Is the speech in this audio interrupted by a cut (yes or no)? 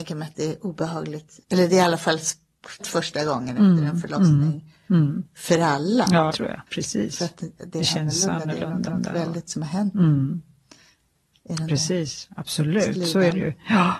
yes